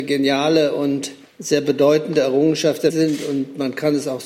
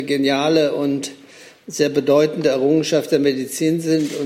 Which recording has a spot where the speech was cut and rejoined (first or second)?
first